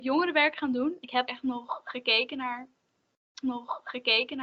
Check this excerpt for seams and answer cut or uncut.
cut